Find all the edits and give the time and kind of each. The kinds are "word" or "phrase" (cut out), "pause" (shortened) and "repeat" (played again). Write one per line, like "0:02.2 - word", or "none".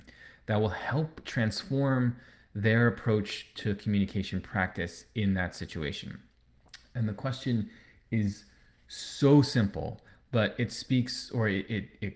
none

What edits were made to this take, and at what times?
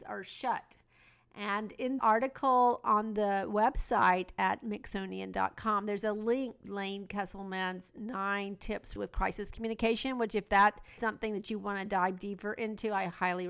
0:02.0 - word
0:06.6 - word
0:09.0 - phrase
0:11.0 - word

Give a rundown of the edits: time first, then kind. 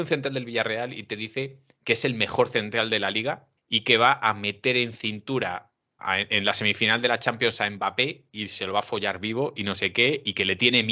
0:03.6 - pause
0:06.0 - word

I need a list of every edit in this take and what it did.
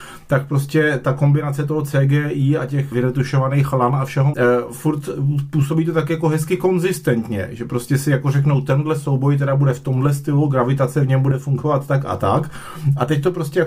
0:02.9 - word
0:04.3 - word

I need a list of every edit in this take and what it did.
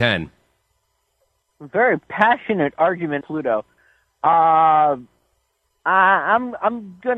0:03.2 - word

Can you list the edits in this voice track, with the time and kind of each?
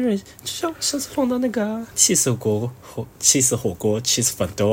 none

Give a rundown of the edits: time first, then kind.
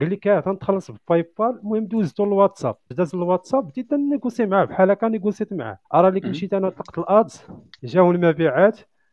0:02.9 - word
0:05.8 - pause
0:07.8 - pause

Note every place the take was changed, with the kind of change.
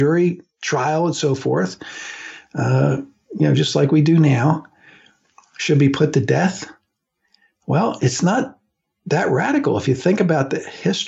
none

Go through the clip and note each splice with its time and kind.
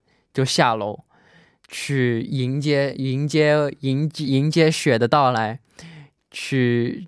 none

